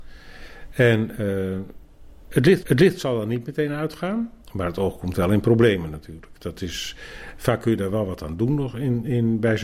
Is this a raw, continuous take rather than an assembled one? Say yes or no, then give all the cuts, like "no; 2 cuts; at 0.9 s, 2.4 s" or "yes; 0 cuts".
no; 2 cuts; at 2.6 s, 4.4 s